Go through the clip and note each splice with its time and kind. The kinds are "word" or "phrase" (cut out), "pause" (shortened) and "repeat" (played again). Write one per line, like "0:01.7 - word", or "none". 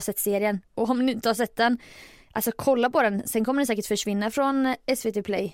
none